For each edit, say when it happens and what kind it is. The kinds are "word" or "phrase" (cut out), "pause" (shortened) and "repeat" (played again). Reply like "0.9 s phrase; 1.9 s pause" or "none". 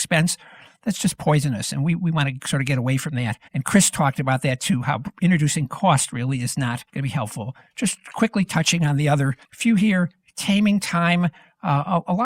3.5 s pause; 6.9 s pause; 9.4 s pause